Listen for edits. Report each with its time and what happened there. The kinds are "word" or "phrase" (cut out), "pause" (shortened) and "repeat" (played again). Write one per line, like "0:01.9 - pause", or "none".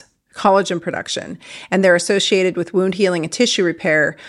none